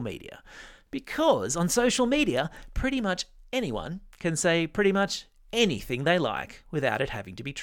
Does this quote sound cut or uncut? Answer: uncut